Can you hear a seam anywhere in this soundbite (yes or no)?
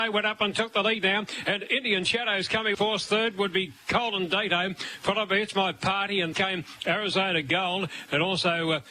yes